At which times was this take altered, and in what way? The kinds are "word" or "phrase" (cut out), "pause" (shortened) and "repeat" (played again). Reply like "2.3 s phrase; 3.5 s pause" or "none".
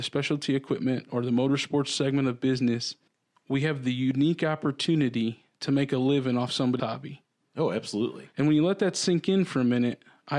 3.1 s pause; 5.5 s pause; 6.8 s word

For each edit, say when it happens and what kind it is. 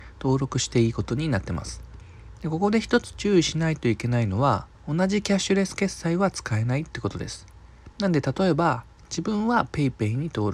4.7 s pause; 7.9 s pause

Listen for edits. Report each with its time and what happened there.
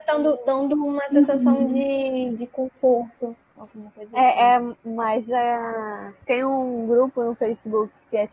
6.2 s pause

